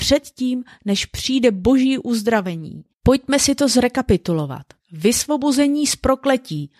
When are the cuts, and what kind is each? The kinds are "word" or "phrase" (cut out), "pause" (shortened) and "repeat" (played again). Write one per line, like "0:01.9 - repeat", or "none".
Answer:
0:02.9 - pause
0:04.8 - pause